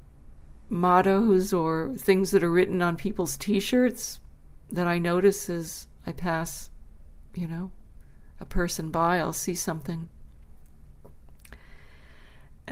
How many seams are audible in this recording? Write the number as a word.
zero